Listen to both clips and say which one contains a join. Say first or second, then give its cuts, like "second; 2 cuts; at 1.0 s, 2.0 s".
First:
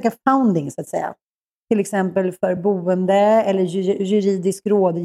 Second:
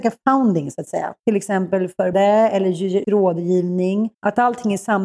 second; 4 cuts; at 1.2 s, 2.1 s, 3.0 s, 4.1 s